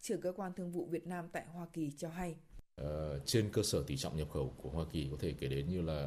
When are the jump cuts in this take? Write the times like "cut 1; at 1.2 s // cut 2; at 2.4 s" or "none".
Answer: cut 1; at 4.6 s